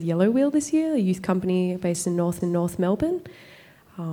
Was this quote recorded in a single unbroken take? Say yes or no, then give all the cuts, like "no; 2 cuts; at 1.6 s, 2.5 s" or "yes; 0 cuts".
no; 1 cut; at 2.4 s